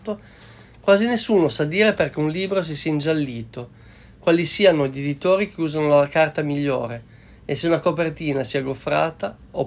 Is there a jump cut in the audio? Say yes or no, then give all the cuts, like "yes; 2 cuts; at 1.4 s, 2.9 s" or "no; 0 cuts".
no; 0 cuts